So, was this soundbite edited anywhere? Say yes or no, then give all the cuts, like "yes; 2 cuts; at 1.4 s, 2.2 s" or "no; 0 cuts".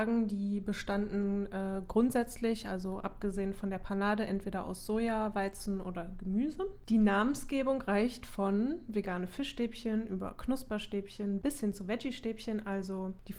no; 0 cuts